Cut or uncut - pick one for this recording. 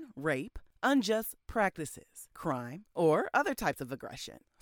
uncut